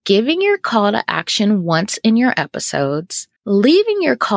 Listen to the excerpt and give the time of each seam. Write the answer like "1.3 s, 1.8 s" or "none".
3.4 s